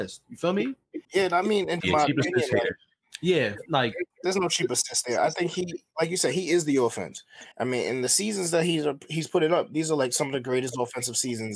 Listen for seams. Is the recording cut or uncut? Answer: cut